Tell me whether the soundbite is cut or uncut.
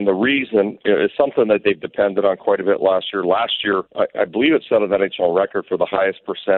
cut